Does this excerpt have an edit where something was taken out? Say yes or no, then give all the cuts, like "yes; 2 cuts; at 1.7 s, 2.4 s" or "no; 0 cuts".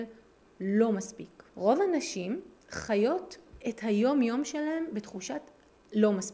yes; 1 cut; at 1.5 s